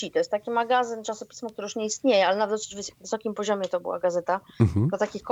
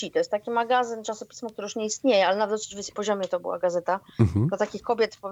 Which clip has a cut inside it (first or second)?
second